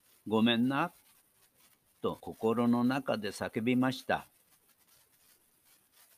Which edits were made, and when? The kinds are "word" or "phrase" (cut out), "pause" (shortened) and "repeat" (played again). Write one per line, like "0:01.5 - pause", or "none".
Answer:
0:02.2 - pause

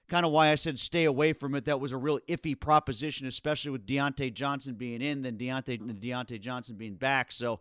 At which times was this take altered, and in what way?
0:05.8 - phrase

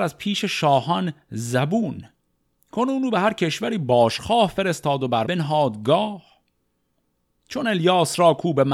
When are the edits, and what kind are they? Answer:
0:05.2 - word

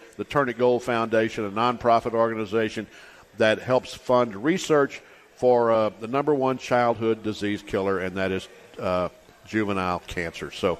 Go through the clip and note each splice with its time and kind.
none

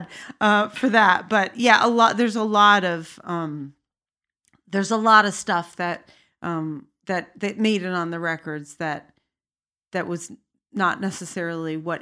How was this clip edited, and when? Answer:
none

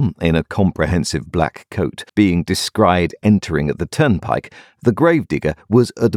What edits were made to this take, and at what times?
0:02.1 - pause

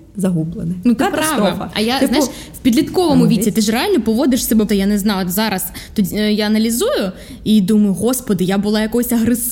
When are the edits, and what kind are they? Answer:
0:04.7 - word

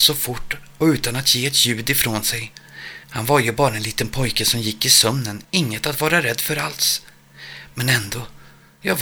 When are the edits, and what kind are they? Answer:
0:03.0 - pause
0:05.4 - pause

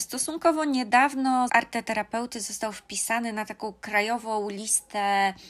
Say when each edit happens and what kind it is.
0:01.5 - word

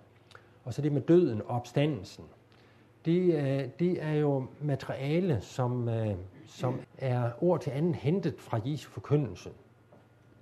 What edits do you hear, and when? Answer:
0:06.8 - word

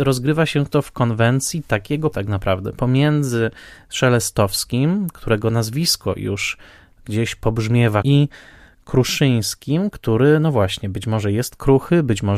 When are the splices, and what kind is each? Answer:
0:02.1 - word
0:08.0 - word

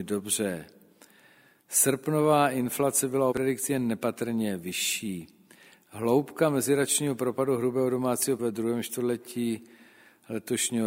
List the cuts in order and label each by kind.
0:03.3 - word
0:08.4 - word

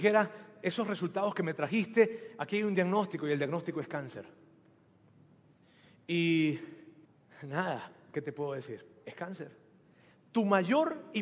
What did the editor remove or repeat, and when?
0:07.0 - pause

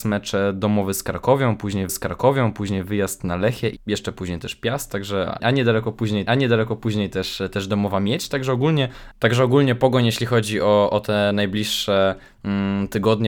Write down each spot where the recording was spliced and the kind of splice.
0:01.9 - repeat
0:03.8 - phrase
0:05.4 - word
0:06.3 - repeat

